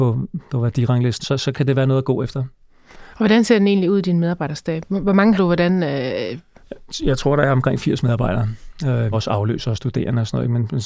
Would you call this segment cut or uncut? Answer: cut